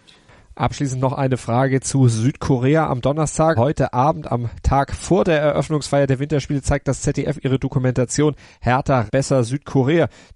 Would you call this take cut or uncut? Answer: cut